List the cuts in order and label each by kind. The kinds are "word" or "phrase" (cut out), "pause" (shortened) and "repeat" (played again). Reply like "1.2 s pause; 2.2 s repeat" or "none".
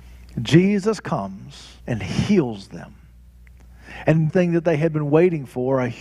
1.8 s pause; 4.3 s word

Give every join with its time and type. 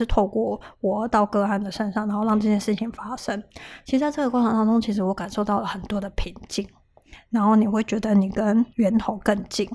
8.7 s pause

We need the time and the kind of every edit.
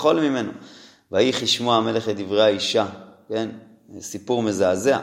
none

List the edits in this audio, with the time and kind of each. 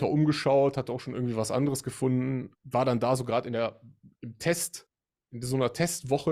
2.5 s pause

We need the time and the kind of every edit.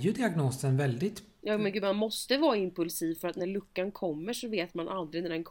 none

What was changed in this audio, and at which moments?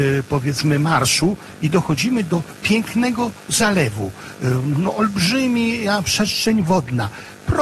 none

